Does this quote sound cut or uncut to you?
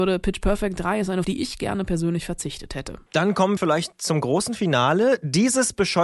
cut